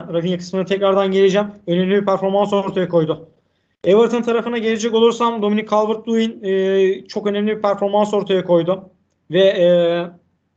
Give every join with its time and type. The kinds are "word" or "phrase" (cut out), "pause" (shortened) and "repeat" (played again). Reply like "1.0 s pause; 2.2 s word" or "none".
none